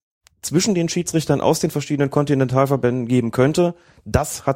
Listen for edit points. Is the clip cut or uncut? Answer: uncut